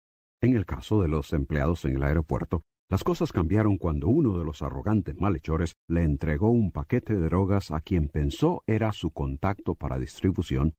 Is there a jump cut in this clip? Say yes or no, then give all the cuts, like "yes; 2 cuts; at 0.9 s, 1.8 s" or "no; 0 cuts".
no; 0 cuts